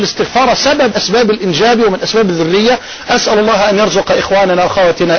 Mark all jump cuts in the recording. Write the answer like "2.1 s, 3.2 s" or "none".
0.9 s